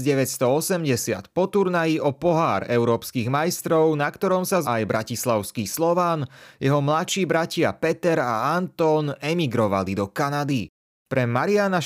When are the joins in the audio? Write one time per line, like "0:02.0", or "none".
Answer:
0:04.6

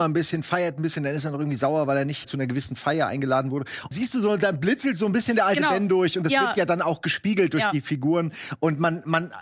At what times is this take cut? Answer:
0:02.2
0:03.9

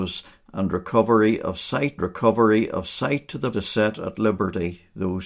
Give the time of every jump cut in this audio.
0:02.0
0:03.5

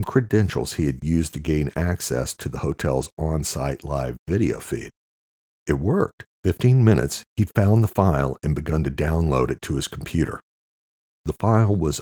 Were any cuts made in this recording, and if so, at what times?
0:06.3

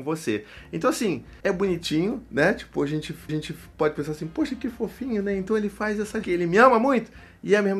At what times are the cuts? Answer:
0:01.4
0:03.3
0:06.2

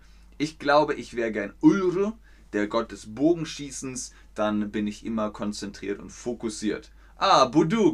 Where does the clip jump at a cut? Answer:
none

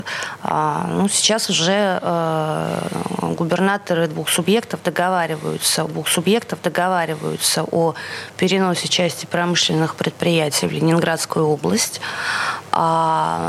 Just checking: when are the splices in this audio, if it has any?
0:05.9

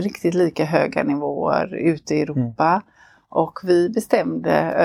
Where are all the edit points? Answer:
none

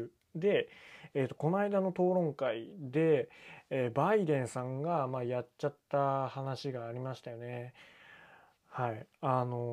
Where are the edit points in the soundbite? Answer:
none

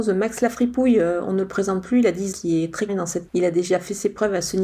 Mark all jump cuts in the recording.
0:02.3
0:02.9
0:03.3

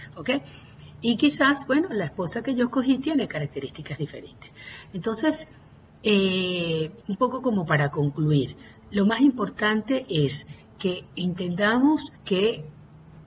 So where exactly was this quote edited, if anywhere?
0:07.0
0:12.2

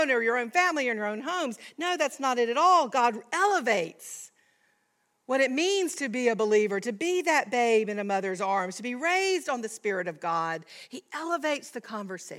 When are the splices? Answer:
none

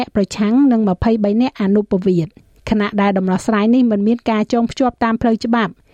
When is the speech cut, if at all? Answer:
0:02.4

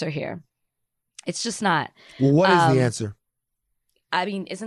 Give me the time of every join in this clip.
none

